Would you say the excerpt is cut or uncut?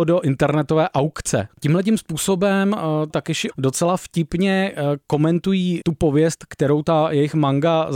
cut